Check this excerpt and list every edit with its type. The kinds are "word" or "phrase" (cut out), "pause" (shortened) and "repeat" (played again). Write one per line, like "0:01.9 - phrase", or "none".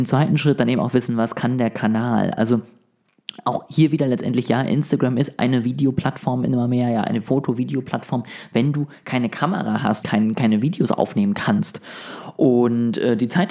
0:10.0 - phrase